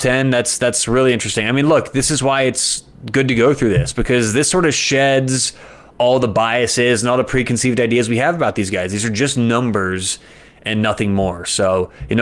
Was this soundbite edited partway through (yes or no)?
no